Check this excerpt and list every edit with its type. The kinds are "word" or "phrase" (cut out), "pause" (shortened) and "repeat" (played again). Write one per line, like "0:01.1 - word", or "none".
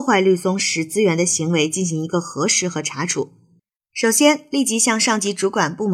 none